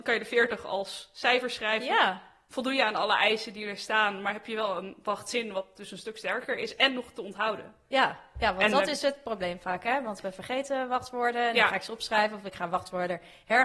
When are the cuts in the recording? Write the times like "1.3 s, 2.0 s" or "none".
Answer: none